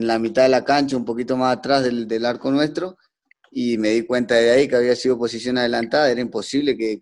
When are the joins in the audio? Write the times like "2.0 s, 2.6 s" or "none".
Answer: none

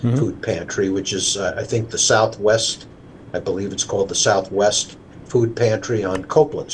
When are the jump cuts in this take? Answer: none

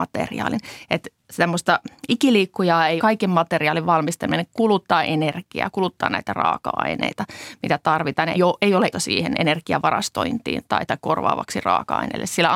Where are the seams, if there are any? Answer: 1.2 s, 3.0 s, 8.3 s, 8.9 s, 10.9 s

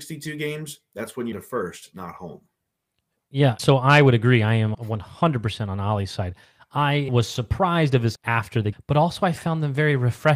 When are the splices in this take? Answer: 1.3 s, 3.6 s, 4.7 s, 7.1 s, 8.2 s, 8.7 s

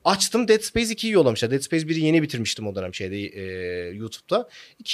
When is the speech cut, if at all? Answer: none

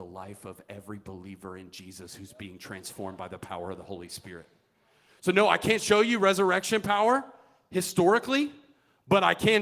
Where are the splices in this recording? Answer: none

